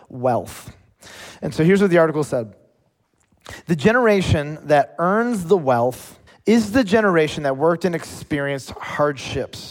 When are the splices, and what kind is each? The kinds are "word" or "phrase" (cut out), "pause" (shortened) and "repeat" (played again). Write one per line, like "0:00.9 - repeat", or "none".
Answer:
0:06.3 - pause